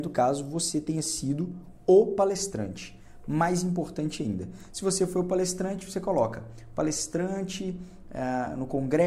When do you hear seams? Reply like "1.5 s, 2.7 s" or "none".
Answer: none